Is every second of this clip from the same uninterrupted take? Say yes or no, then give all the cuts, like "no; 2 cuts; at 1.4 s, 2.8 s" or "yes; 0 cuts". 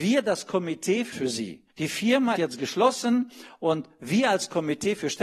no; 3 cuts; at 1.1 s, 1.7 s, 2.4 s